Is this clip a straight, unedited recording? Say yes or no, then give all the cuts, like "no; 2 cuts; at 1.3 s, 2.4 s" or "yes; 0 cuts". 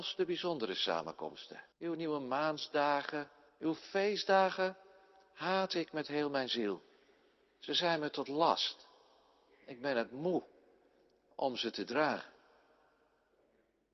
no; 2 cuts; at 1.7 s, 3.5 s